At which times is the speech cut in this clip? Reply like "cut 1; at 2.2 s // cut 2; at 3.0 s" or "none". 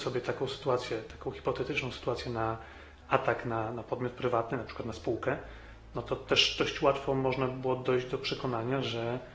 none